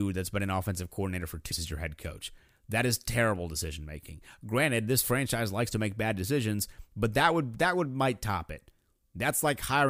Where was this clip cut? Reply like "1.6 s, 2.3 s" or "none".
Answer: 1.5 s

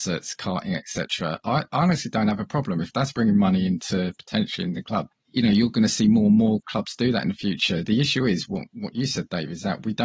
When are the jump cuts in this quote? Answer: 5.1 s

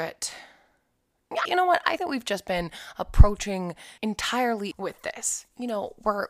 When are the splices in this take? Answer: 1.4 s, 2.0 s, 4.0 s, 4.7 s

